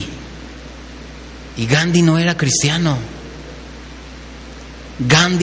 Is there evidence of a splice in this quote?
no; 0 cuts

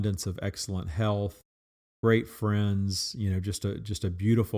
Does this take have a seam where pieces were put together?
no; 0 cuts

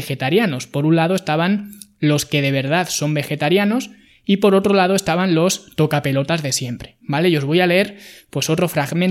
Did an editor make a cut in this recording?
no; 0 cuts

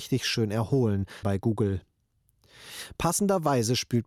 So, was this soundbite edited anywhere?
yes; 1 cut; at 1.2 s

